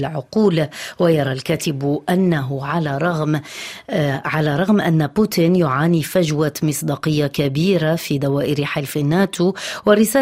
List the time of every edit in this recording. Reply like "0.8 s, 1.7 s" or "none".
none